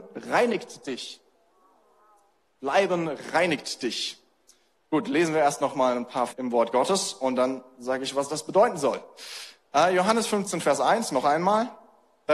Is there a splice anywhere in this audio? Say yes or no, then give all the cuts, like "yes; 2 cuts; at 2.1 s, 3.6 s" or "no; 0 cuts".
yes; 1 cut; at 6.3 s